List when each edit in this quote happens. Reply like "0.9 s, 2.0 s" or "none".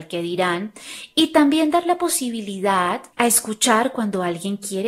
3.1 s